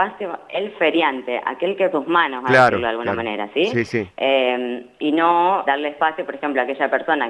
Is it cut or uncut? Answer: cut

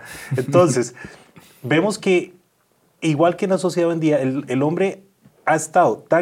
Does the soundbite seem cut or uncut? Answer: uncut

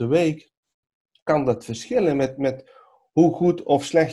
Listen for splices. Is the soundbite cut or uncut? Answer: uncut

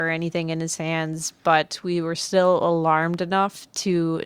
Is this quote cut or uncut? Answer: uncut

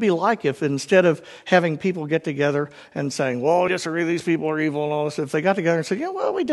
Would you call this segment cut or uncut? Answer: cut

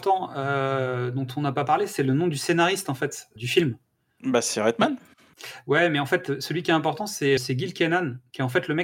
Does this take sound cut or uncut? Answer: cut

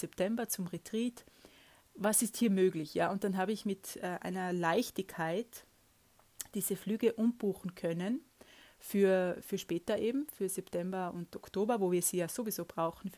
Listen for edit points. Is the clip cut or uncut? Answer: uncut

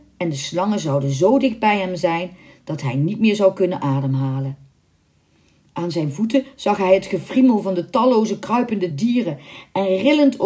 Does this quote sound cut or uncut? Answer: uncut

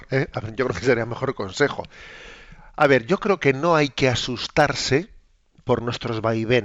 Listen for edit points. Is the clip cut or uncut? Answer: uncut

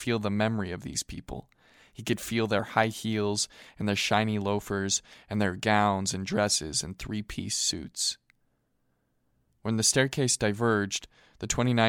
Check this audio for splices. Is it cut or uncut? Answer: uncut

